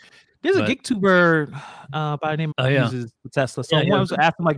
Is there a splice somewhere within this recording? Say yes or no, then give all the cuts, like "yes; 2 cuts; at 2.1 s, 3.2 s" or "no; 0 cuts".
yes; 1 cut; at 2.5 s